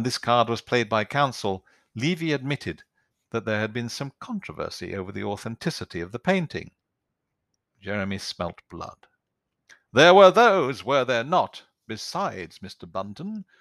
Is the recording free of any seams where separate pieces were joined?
yes; 0 cuts

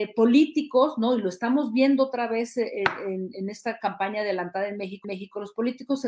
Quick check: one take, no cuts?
no; 1 cut; at 5.0 s

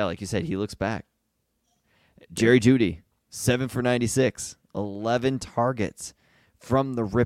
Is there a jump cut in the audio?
no; 0 cuts

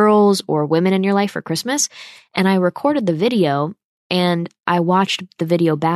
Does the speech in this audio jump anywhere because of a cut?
no; 0 cuts

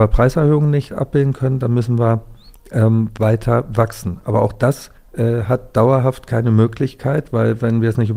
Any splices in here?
yes; 1 cut; at 5.0 s

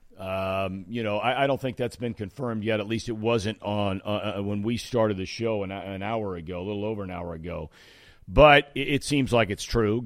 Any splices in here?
no; 0 cuts

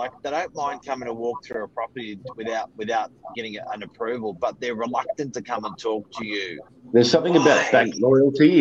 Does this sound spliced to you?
yes; 1 cut; at 6.7 s

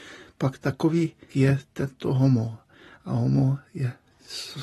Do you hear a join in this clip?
yes; 1 cut; at 1.3 s

